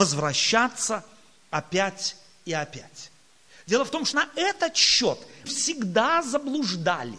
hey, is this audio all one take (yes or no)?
no